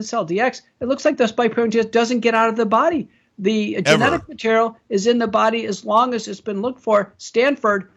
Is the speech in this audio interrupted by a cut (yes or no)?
no